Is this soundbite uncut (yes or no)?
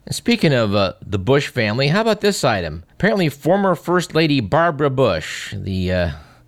no